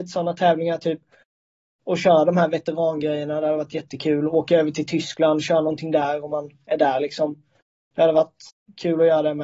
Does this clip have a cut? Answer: no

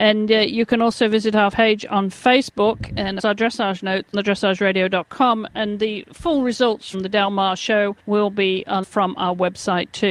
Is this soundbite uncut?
no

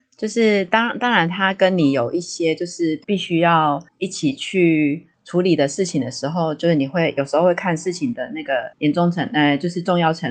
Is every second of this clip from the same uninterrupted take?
no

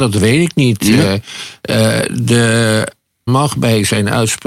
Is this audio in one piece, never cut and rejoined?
no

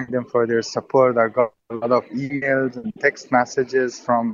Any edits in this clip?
no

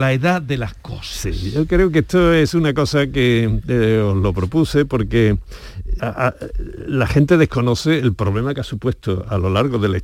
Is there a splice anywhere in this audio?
yes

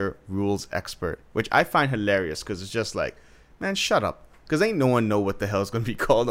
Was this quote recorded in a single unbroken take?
yes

